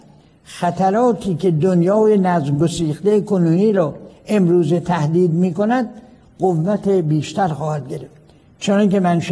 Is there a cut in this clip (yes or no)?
no